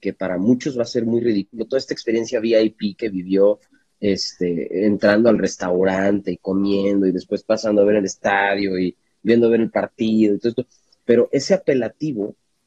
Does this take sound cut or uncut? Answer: uncut